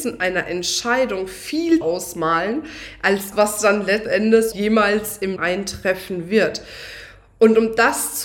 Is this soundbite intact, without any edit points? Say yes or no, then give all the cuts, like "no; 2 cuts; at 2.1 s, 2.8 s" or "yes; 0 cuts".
no; 5 cuts; at 1.8 s, 3.3 s, 4.0 s, 4.5 s, 5.4 s